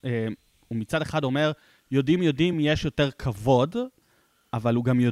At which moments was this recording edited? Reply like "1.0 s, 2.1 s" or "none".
none